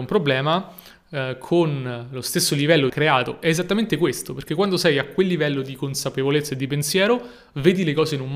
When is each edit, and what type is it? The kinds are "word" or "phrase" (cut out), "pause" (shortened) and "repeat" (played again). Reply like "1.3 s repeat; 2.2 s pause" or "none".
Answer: 2.9 s phrase